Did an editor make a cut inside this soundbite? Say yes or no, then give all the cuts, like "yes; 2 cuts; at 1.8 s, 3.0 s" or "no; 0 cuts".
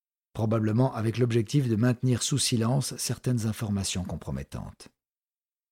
no; 0 cuts